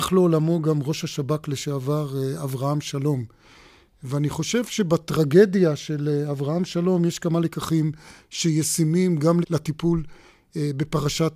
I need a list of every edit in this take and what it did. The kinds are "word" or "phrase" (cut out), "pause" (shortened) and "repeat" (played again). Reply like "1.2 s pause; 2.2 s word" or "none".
9.4 s word